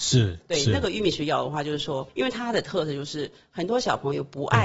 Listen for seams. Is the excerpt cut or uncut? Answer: uncut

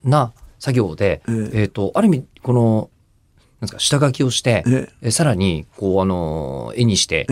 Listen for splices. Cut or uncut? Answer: uncut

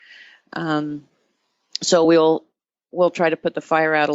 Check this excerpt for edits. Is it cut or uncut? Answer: uncut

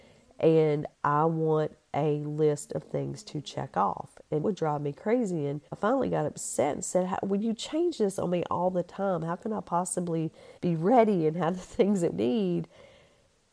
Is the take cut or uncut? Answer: cut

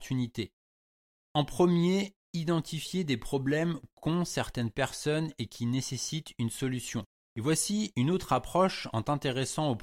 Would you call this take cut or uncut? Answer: uncut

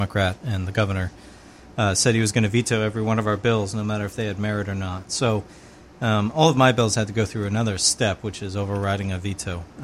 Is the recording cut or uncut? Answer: uncut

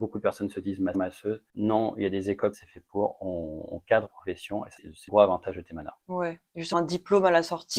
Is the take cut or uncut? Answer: cut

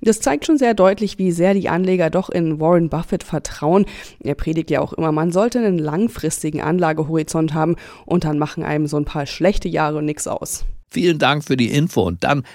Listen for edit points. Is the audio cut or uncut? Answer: cut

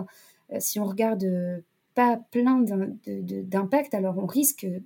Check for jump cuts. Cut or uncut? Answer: cut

